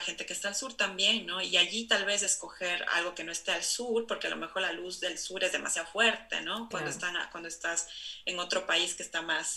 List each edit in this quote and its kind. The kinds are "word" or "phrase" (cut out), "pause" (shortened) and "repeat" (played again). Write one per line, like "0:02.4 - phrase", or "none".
none